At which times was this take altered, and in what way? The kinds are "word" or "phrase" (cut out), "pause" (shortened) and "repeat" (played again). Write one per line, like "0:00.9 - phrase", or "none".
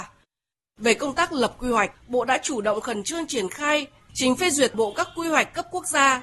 0:01.9 - pause
0:04.7 - word